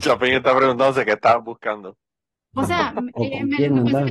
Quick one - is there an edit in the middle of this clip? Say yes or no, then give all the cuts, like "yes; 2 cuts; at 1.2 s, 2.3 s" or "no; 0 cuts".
no; 0 cuts